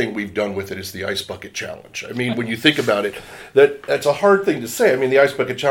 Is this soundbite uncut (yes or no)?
yes